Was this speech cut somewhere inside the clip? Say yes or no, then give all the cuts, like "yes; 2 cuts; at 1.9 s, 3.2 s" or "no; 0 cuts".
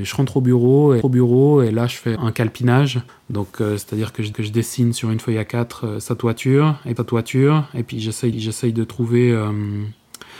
yes; 6 cuts; at 1.0 s, 2.2 s, 3.1 s, 4.3 s, 7.0 s, 8.3 s